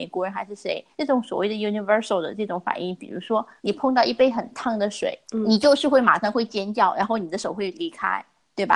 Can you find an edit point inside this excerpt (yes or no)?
yes